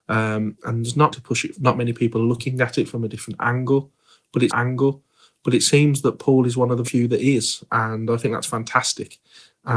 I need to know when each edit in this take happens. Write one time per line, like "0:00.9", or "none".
0:01.1
0:01.5
0:04.5
0:06.8